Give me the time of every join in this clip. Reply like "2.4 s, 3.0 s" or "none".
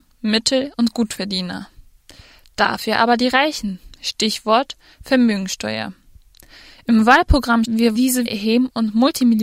7.6 s, 8.0 s, 8.3 s